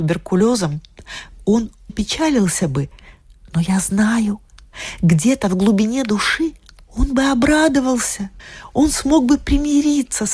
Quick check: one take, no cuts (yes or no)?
no